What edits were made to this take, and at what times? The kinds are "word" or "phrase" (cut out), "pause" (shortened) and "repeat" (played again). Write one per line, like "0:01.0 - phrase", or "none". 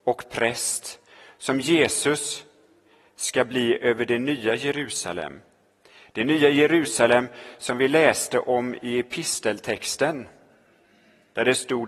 none